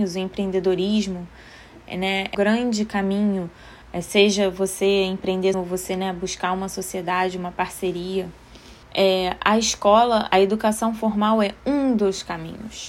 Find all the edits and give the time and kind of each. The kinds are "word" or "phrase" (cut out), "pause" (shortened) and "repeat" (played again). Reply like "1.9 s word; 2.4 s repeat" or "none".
2.3 s word; 3.8 s pause; 5.5 s word; 8.8 s pause